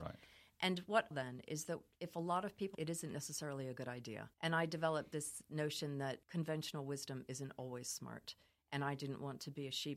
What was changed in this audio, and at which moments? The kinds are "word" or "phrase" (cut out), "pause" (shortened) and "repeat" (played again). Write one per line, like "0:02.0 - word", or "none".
0:01.1 - phrase
0:02.7 - phrase
0:04.3 - pause
0:06.2 - pause